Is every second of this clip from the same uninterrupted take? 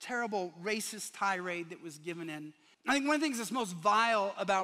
no; 1 cut; at 2.7 s

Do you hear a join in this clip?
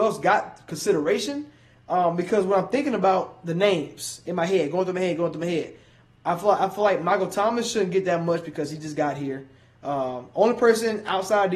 no; 0 cuts

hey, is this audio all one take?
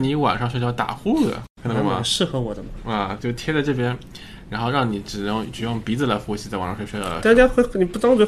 no; 1 cut; at 3.2 s

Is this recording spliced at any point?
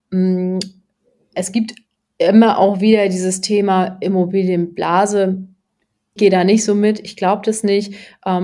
yes; 1 cut; at 6.2 s

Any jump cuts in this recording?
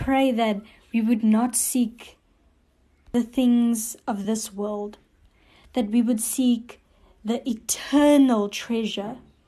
no; 0 cuts

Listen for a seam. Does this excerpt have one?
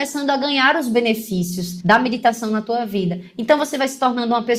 no; 0 cuts

